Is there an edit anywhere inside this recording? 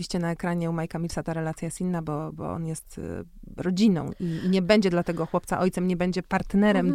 no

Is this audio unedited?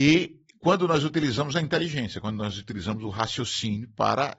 yes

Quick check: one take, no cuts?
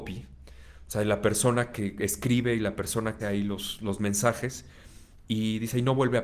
no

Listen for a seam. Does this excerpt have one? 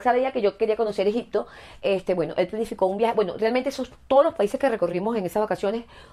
no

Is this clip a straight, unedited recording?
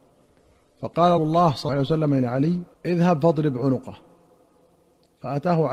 no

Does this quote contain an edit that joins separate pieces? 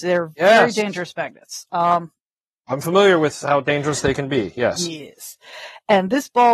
no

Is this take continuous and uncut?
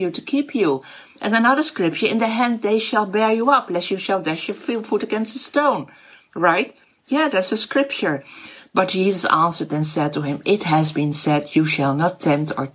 yes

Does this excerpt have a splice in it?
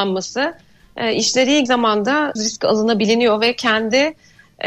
yes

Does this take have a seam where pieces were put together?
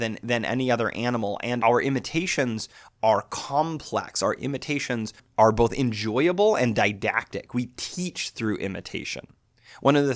no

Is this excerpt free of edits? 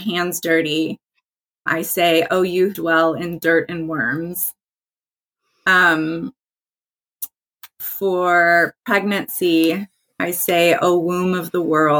no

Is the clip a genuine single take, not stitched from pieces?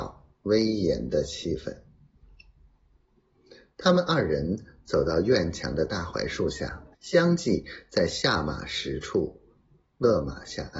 no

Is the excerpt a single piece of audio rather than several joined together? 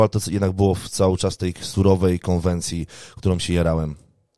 yes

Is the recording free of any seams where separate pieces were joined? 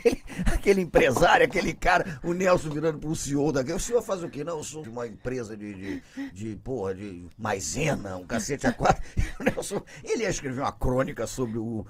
no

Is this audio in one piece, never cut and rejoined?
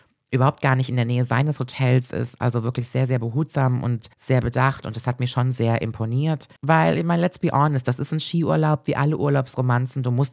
no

